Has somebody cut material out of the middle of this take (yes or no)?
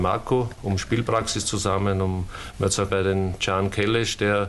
yes